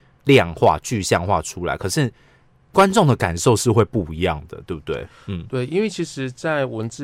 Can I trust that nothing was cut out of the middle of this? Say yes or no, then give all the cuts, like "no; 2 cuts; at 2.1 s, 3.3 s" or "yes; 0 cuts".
yes; 0 cuts